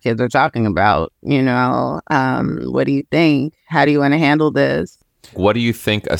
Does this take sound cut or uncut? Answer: uncut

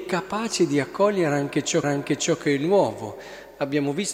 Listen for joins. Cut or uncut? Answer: cut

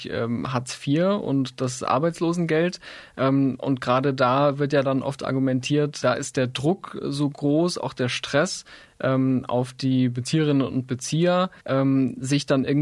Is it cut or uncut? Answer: cut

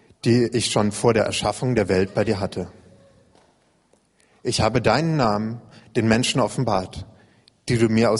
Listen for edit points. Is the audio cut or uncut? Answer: uncut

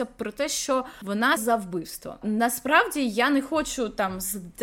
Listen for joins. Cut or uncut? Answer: cut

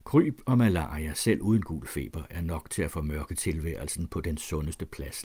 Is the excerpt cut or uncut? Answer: uncut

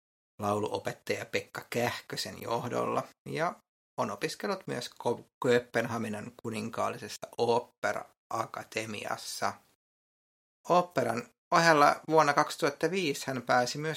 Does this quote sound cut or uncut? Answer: uncut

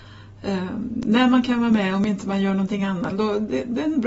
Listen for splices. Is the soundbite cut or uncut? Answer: cut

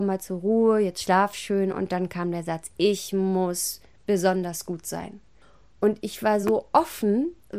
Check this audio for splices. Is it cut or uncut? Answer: uncut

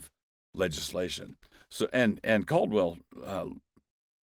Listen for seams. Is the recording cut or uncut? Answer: uncut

